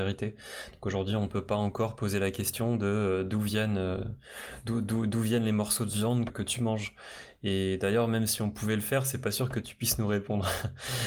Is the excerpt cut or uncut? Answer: cut